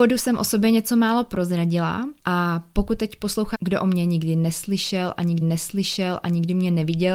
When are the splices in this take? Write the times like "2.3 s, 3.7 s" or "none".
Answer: 2.2 s, 3.5 s, 5.4 s